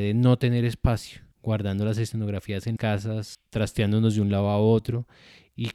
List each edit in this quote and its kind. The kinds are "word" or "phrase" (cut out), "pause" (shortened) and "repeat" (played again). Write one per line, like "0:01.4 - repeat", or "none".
0:01.3 - pause
0:02.8 - word